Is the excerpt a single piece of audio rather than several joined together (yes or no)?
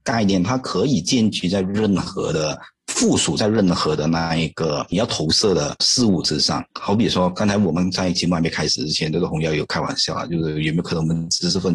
yes